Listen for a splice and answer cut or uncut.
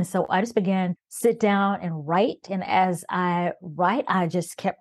cut